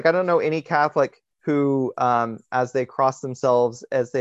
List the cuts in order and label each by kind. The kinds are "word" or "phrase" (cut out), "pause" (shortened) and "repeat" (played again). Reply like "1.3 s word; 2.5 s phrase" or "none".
1.3 s pause